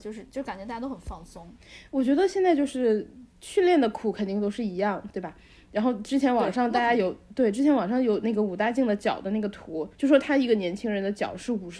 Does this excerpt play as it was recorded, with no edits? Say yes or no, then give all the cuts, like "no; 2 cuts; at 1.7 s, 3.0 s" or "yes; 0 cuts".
no; 1 cut; at 9.9 s